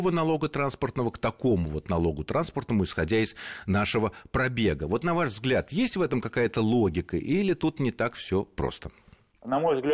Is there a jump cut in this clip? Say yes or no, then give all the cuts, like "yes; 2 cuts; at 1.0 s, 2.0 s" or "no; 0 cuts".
no; 0 cuts